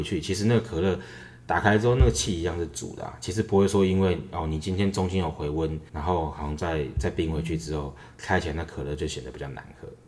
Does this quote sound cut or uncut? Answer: cut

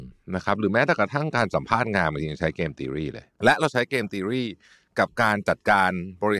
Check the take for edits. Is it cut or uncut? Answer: uncut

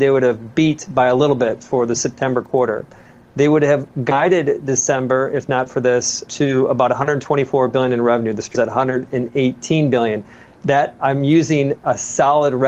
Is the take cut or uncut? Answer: cut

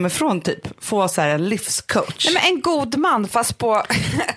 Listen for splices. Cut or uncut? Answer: uncut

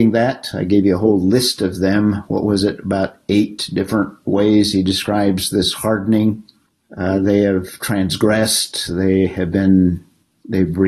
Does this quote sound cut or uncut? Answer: uncut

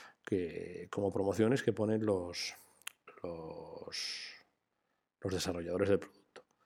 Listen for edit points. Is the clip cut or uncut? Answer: uncut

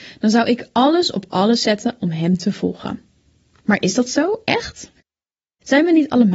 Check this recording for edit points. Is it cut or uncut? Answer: uncut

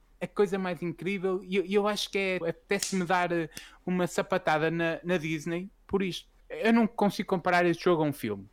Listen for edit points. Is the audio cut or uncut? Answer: cut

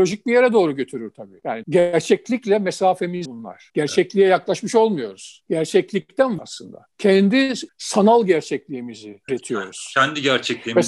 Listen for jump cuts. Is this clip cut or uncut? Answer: cut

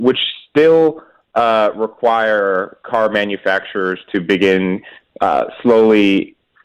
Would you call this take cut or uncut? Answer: uncut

